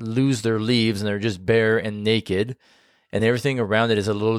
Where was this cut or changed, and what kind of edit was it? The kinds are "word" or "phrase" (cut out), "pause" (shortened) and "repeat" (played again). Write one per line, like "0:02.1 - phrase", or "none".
none